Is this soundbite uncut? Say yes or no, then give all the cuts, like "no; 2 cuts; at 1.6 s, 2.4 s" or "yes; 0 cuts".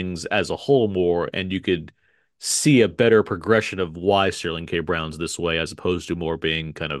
yes; 0 cuts